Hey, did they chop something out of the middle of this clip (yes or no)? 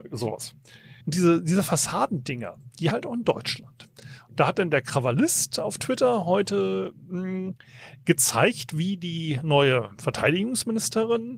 yes